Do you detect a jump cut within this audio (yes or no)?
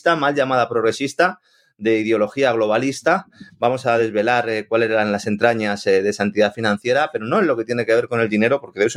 no